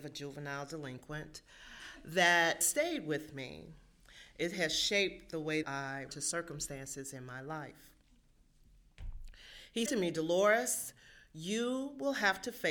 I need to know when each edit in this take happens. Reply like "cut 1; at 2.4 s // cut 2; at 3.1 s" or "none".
cut 1; at 2.6 s // cut 2; at 5.6 s // cut 3; at 6.1 s // cut 4; at 9.9 s